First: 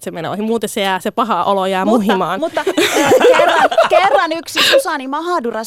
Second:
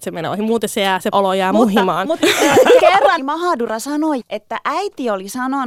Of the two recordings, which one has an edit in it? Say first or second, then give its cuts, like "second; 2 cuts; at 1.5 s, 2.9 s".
second; 5 cuts; at 1.1 s, 2.2 s, 2.8 s, 3.2 s, 4.2 s